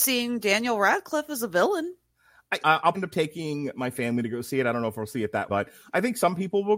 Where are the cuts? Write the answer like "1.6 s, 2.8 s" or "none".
2.6 s, 2.9 s, 5.5 s